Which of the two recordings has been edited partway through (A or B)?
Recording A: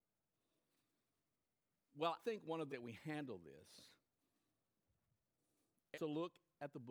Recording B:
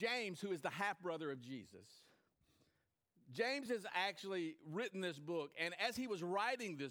A